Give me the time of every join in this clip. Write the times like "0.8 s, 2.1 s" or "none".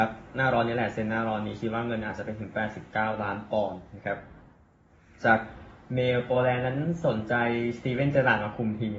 none